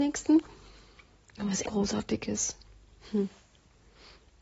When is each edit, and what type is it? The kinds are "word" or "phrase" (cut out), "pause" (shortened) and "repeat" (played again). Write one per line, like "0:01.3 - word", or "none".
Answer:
0:01.6 - phrase